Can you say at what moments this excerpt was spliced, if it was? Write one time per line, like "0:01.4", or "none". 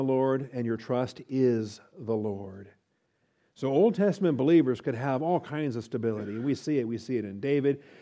none